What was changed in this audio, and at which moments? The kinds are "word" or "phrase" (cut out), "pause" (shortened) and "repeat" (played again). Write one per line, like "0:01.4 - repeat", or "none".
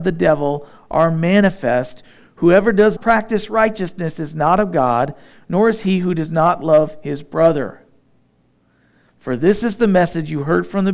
0:03.0 - word